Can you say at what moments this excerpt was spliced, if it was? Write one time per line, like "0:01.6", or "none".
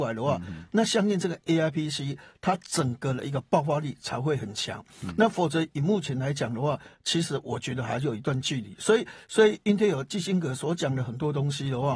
none